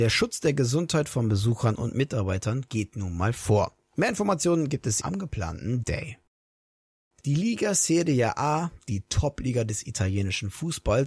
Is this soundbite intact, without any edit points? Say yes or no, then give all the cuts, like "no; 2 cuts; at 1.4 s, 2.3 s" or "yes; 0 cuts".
no; 2 cuts; at 5.0 s, 5.8 s